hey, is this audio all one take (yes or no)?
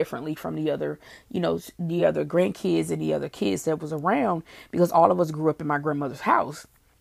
yes